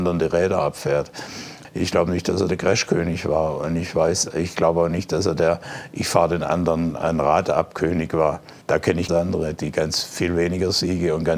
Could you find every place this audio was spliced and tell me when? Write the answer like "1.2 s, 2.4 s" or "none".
8.6 s, 9.1 s